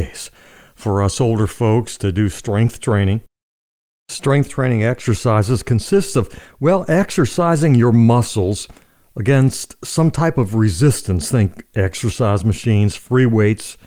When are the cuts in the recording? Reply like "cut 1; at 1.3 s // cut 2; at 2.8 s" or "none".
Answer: none